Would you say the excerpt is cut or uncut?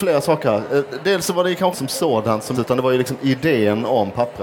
cut